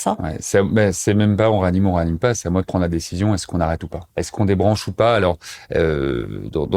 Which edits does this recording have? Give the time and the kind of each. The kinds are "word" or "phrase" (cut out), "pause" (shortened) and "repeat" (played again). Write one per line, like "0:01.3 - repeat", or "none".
0:04.1 - pause